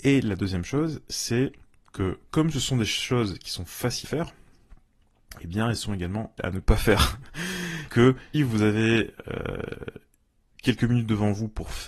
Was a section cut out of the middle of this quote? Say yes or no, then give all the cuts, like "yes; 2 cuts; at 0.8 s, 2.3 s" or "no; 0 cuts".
yes; 4 cuts; at 4.0 s, 6.4 s, 7.9 s, 8.3 s